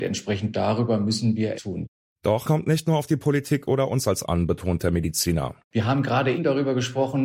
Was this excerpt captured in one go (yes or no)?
no